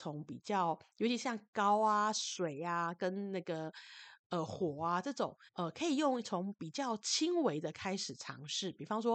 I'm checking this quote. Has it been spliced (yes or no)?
yes